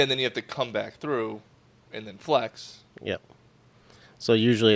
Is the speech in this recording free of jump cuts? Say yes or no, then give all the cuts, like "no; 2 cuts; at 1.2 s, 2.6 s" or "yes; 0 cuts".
yes; 0 cuts